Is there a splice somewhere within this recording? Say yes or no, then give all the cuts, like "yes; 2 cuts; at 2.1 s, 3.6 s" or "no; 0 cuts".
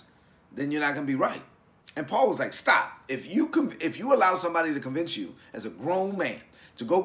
no; 0 cuts